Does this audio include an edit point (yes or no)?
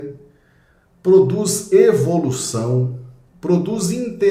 no